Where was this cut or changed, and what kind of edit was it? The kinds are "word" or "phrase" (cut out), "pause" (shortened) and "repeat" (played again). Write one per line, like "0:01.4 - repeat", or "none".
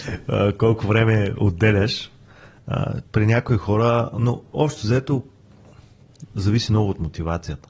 none